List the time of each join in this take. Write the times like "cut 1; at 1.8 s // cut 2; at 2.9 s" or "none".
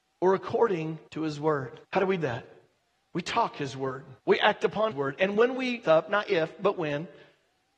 cut 1; at 1.1 s // cut 2; at 1.8 s // cut 3; at 2.2 s // cut 4; at 4.2 s // cut 5; at 4.9 s // cut 6; at 5.8 s